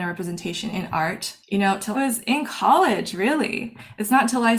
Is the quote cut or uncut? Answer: cut